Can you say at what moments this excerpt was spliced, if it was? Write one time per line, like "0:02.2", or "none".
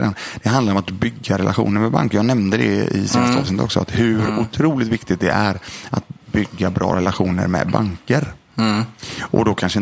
none